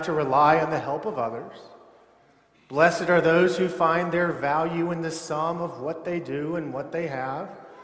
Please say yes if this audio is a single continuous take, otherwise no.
yes